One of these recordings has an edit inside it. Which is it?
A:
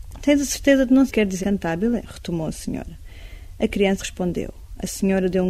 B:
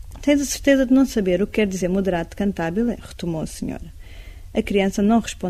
A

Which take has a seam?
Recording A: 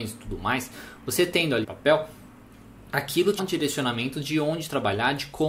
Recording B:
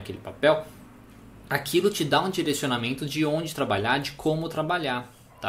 A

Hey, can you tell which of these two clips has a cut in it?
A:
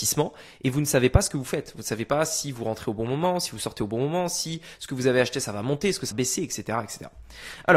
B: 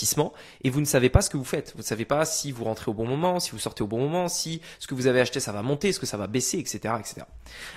A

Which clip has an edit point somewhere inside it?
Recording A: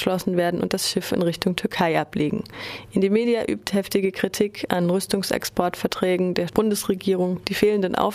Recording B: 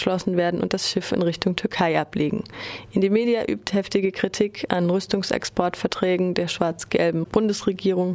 A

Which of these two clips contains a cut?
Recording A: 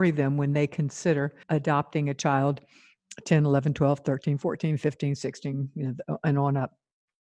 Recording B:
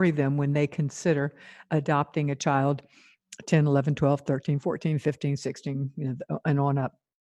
A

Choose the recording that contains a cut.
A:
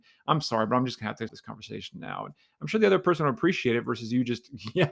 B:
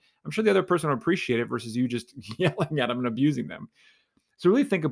A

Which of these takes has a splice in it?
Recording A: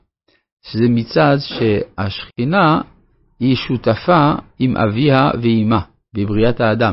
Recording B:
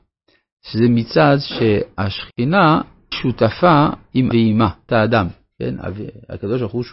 B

